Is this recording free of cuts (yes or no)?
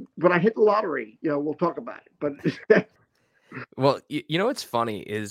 no